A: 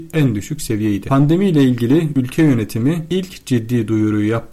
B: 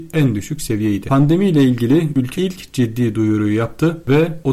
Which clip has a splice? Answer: B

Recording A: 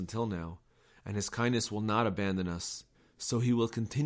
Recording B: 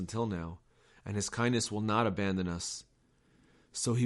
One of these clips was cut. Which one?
A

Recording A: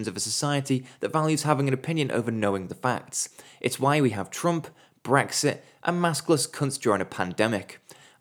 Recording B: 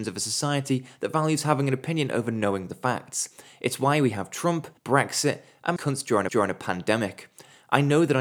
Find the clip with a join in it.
B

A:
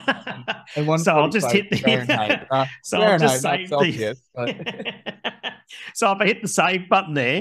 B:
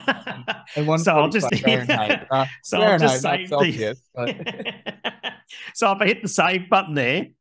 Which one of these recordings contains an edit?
B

